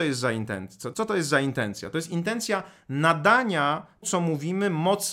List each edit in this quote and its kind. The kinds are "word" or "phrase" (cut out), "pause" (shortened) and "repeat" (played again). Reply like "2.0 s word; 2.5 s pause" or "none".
0.9 s word; 4.0 s word